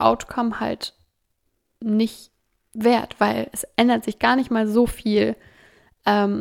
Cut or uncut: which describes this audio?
uncut